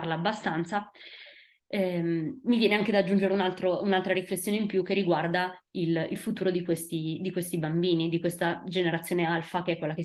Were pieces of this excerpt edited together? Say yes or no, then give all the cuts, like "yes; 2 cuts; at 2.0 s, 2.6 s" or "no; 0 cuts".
no; 0 cuts